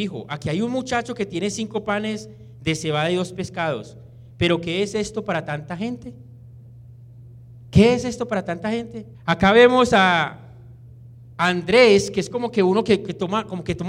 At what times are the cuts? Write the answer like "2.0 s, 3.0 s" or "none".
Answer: 9.1 s

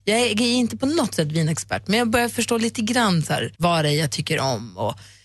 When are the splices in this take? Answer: 3.5 s

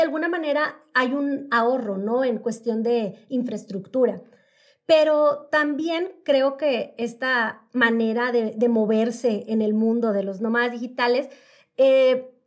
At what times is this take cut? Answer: none

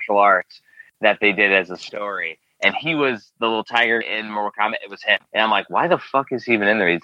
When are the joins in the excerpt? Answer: 4.0 s, 5.3 s

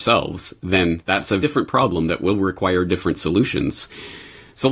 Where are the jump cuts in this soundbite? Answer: 1.4 s

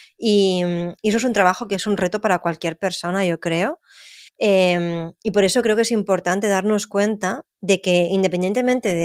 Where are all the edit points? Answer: 1.0 s, 4.3 s, 7.5 s

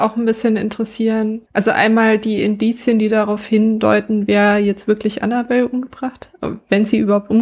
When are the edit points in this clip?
1.5 s

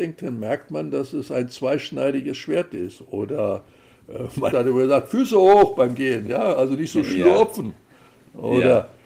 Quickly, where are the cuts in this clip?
4.5 s

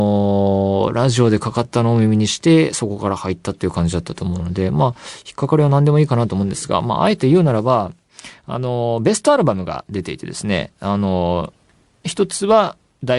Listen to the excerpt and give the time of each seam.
none

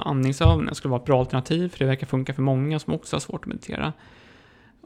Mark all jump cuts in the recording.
none

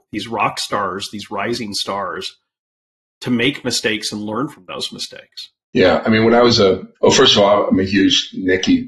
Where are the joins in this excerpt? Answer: 7.0 s

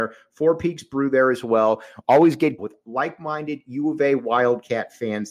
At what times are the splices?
2.6 s

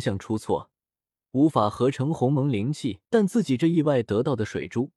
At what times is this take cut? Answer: 3.0 s

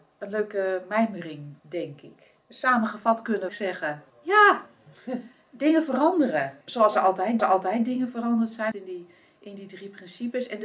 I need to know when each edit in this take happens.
1.6 s, 2.4 s, 3.5 s, 4.1 s, 6.6 s, 7.4 s, 8.7 s

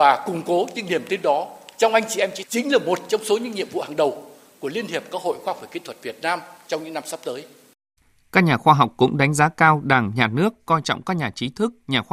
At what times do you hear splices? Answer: 2.4 s

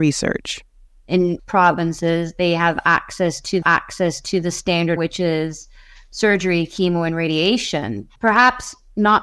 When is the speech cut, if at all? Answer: 1.4 s, 3.6 s, 5.0 s, 8.2 s

